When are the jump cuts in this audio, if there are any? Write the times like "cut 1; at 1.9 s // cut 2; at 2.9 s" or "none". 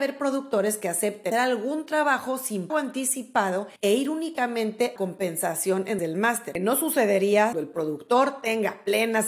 cut 1; at 1.3 s // cut 2; at 2.7 s // cut 3; at 3.8 s // cut 4; at 5.0 s // cut 5; at 6.0 s // cut 6; at 7.5 s